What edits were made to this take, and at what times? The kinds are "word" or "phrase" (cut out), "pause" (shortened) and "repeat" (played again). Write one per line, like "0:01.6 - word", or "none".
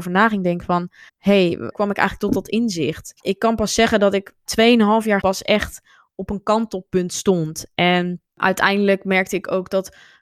0:01.1 - pause
0:01.7 - word
0:03.2 - pause
0:04.5 - word
0:05.2 - word
0:08.3 - pause